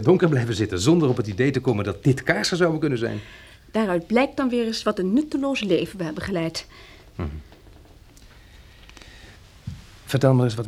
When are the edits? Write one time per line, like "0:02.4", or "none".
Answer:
none